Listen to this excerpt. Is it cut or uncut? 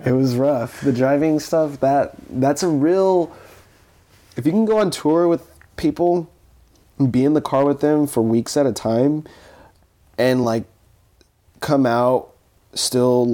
uncut